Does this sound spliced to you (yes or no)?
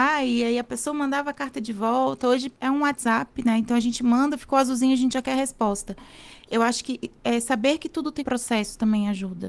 yes